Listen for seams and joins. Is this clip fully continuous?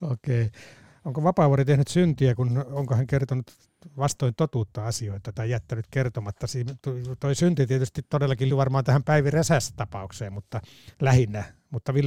no; 2 cuts; at 8.5 s, 10.9 s

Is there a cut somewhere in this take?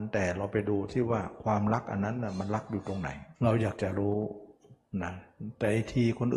yes; 1 cut; at 3.4 s

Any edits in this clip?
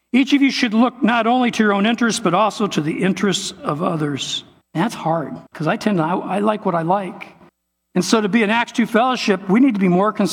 yes; 3 cuts; at 4.6 s, 5.5 s, 7.5 s

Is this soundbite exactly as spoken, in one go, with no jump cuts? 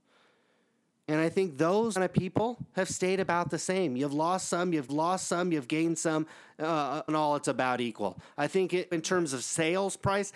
no; 4 cuts; at 2.0 s, 4.9 s, 7.1 s, 8.9 s

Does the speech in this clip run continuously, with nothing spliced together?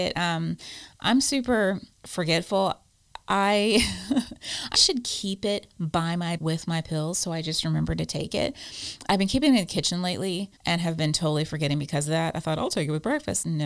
no; 5 cuts; at 1.9 s, 4.7 s, 6.4 s, 9.1 s, 10.6 s

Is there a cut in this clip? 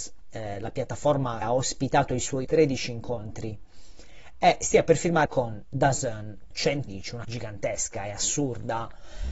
yes; 6 cuts; at 1.4 s, 2.4 s, 5.3 s, 6.5 s, 6.9 s, 7.2 s

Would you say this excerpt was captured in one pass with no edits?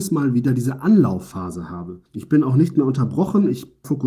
no; 1 cut; at 2.1 s

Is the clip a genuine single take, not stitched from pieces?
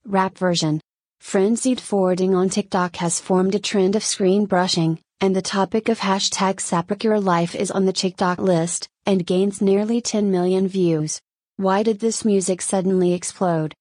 no; 1 cut; at 8.4 s

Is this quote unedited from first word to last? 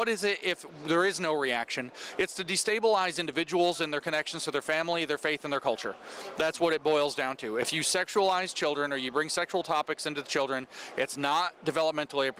yes; 0 cuts

